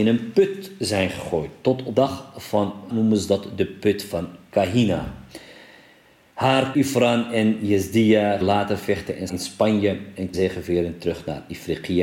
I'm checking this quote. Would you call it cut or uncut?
cut